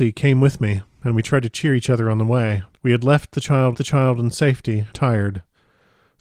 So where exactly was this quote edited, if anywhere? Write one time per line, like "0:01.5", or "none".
0:02.7
0:03.7
0:04.9